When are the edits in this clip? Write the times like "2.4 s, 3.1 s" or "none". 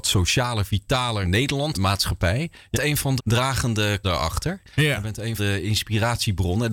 1.2 s, 1.7 s, 2.7 s, 3.2 s, 4.0 s, 5.4 s